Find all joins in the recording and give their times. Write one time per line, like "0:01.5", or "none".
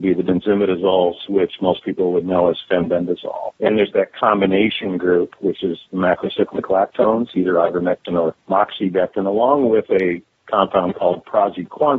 0:03.6
0:08.4